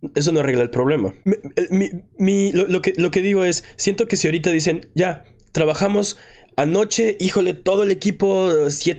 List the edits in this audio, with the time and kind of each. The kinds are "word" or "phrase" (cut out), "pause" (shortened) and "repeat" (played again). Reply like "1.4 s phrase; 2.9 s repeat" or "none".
1.2 s pause